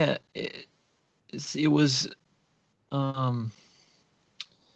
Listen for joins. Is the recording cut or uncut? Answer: uncut